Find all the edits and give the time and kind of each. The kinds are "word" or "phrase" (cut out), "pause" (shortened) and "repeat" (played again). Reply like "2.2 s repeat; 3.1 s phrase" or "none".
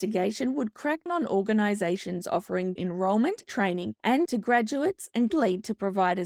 1.1 s word; 2.8 s word; 3.4 s word; 4.3 s word; 5.3 s word